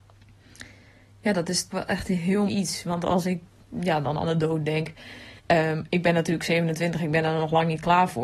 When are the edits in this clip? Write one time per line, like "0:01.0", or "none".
0:01.7
0:02.5
0:05.4